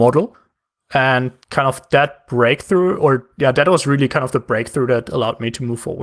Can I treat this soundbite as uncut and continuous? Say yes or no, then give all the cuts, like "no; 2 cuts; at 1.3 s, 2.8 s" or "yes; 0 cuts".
no; 1 cut; at 1.4 s